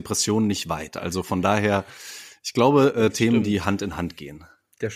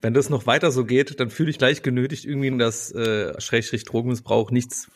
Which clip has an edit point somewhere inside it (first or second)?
second